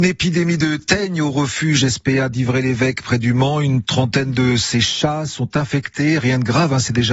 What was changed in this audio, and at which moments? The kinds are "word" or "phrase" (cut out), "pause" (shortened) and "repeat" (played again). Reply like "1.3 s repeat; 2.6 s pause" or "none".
none